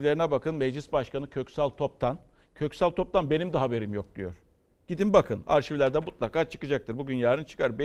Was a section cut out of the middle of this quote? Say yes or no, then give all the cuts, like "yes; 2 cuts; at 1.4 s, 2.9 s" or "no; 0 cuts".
no; 0 cuts